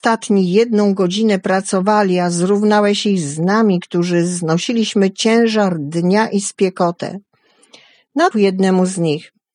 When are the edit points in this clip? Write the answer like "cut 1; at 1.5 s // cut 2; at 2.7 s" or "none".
cut 1; at 8.3 s

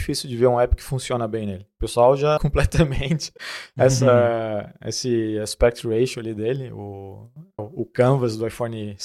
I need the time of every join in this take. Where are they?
cut 1; at 2.4 s // cut 2; at 3.4 s // cut 3; at 7.6 s

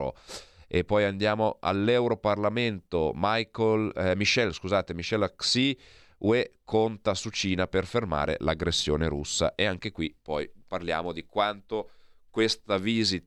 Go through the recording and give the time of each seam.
none

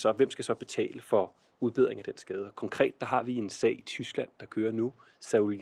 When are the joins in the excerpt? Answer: none

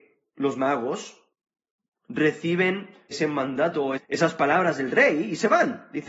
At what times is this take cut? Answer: cut 1; at 3.1 s // cut 2; at 4.0 s

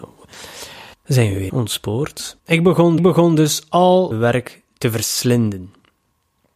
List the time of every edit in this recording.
cut 1; at 0.9 s // cut 2; at 1.5 s // cut 3; at 2.4 s // cut 4; at 3.0 s // cut 5; at 4.1 s

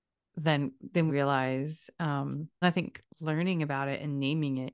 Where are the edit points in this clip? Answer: cut 1; at 1.1 s // cut 2; at 2.6 s // cut 3; at 3.1 s

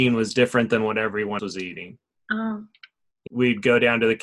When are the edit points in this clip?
cut 1; at 1.4 s // cut 2; at 3.3 s

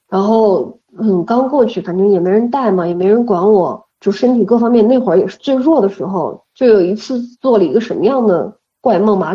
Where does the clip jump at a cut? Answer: cut 1; at 3.9 s // cut 2; at 7.3 s

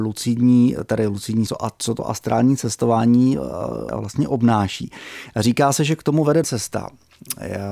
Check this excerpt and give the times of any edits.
cut 1; at 1.5 s // cut 2; at 3.9 s // cut 3; at 6.4 s

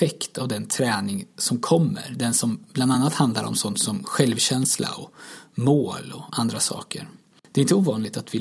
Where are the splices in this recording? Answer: none

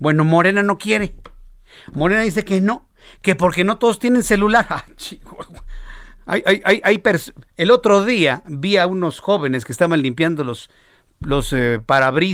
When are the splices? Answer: none

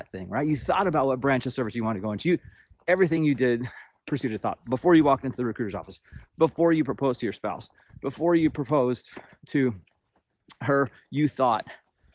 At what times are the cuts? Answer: none

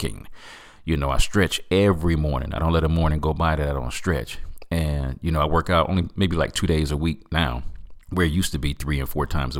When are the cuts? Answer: cut 1; at 8.0 s

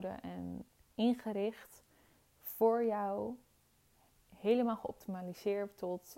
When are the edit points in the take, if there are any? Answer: none

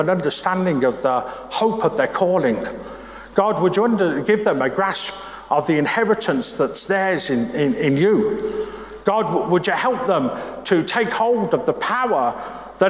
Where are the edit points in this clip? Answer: none

